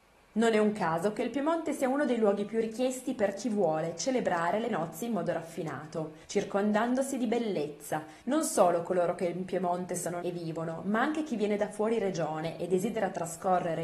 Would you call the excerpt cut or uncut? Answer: cut